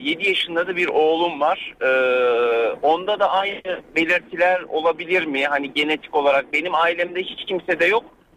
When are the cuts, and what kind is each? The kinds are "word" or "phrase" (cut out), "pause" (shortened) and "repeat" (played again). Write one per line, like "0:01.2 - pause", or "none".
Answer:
none